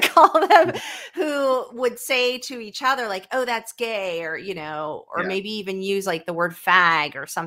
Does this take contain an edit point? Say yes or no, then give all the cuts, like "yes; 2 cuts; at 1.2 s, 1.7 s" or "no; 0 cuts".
no; 0 cuts